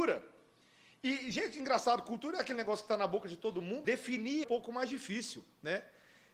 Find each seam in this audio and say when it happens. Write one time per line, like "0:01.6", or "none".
0:03.8
0:04.4